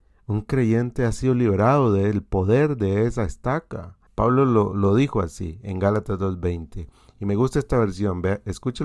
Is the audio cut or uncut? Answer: cut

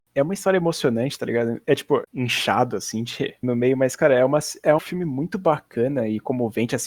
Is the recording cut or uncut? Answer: cut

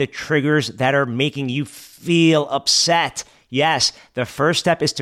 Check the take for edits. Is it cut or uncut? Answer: uncut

